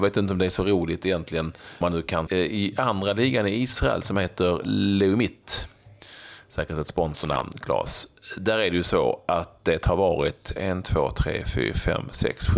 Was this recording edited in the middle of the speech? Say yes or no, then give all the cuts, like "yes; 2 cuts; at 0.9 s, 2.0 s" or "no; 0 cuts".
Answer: yes; 3 cuts; at 1.8 s, 2.3 s, 4.6 s